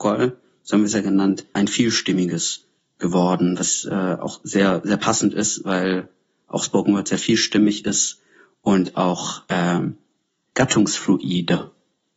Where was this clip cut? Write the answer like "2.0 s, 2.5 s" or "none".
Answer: 1.6 s

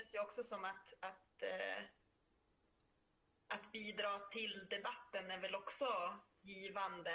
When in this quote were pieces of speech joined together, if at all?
none

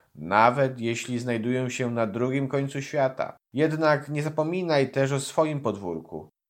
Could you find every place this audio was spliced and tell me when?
3.4 s

